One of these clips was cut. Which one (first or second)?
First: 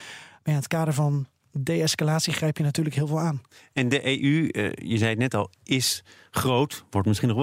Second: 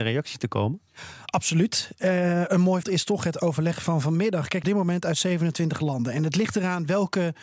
second